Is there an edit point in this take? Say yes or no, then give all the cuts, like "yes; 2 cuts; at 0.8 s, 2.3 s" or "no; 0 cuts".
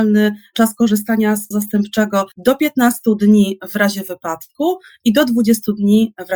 yes; 2 cuts; at 1.5 s, 2.3 s